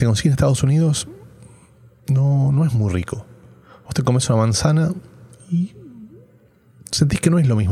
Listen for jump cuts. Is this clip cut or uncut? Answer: uncut